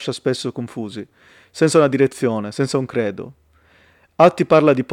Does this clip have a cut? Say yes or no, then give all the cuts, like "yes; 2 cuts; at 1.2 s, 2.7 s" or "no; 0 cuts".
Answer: no; 0 cuts